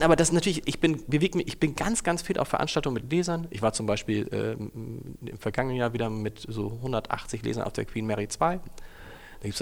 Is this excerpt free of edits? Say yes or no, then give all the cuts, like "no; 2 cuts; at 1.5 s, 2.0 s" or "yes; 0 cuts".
yes; 0 cuts